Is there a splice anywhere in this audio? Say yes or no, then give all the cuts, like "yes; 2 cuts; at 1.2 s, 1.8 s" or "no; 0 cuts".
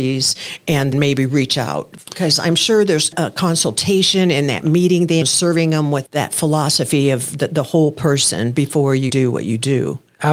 yes; 3 cuts; at 0.9 s, 5.2 s, 9.1 s